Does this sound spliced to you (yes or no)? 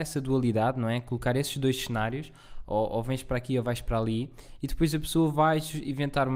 no